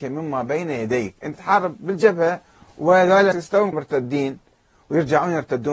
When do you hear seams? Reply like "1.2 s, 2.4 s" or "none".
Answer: 1.3 s, 3.3 s, 3.7 s